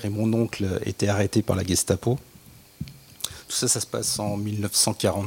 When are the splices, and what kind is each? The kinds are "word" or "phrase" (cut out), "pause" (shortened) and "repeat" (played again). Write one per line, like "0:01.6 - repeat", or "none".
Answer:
none